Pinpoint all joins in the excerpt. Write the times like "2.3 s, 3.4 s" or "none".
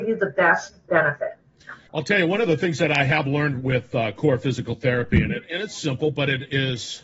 1.9 s